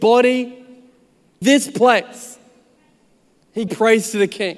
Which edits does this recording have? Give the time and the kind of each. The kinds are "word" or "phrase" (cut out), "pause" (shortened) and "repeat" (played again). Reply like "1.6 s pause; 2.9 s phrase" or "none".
1.4 s word; 3.7 s word